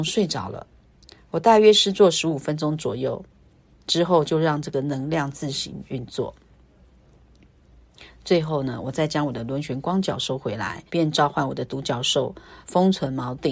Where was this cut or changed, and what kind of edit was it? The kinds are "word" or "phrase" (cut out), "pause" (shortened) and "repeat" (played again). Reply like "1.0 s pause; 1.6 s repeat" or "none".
10.9 s pause; 12.6 s pause